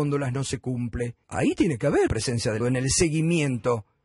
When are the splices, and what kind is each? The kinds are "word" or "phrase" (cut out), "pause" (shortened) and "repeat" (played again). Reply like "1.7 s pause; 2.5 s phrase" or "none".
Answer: 1.2 s pause; 2.1 s word; 2.6 s word